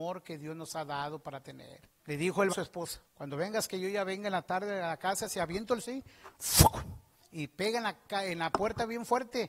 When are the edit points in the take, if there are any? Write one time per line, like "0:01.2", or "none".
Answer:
0:02.0
0:02.5
0:03.0
0:05.8
0:07.2